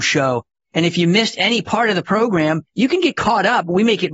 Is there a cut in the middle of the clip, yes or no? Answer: yes